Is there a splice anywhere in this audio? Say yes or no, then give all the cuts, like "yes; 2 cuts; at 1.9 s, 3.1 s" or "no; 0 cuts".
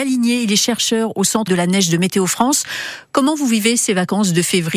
yes; 1 cut; at 1.5 s